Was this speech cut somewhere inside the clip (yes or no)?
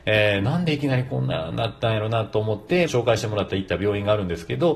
yes